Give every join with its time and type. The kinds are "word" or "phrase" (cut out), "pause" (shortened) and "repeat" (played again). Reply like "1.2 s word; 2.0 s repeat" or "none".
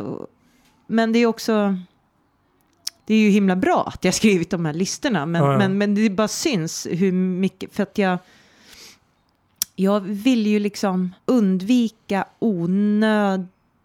3.0 s pause; 11.2 s pause

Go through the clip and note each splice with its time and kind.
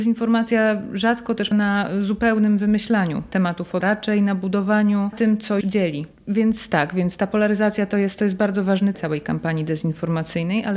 1.5 s word; 3.8 s word; 5.1 s word; 5.6 s word; 8.9 s word

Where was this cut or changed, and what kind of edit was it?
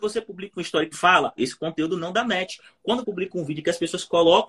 0.9 s word; 1.4 s word; 3.0 s word

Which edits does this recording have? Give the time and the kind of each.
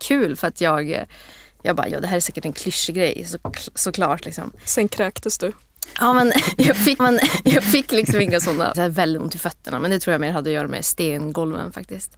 1.9 s word; 7.0 s repeat; 8.7 s phrase

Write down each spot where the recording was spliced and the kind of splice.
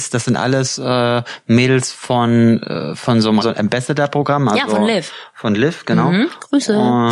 3.4 s word

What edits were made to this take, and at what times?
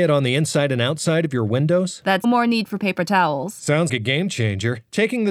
2.2 s phrase; 3.9 s word

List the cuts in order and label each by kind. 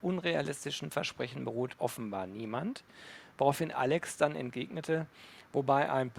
1.8 s word

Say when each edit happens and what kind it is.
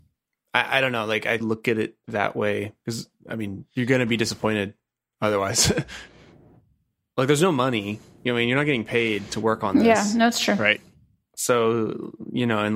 1.4 s phrase

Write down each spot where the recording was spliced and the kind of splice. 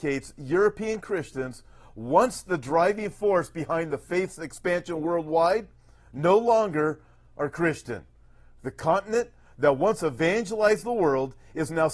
none

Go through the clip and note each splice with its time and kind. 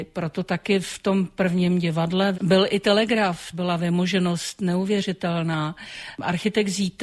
2.3 s word; 3.5 s word

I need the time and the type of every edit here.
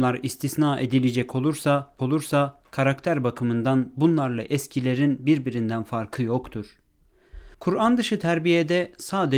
2.0 s repeat; 7.5 s pause

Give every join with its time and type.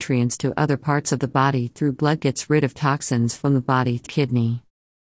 4.1 s word

